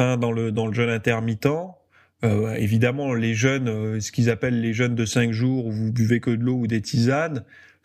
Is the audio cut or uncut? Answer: uncut